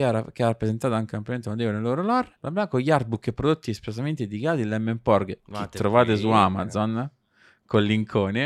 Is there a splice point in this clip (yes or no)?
yes